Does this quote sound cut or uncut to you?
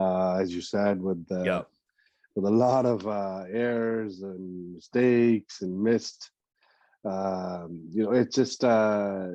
uncut